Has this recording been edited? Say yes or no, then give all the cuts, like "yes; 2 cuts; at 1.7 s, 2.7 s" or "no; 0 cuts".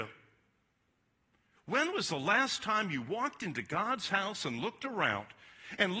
no; 0 cuts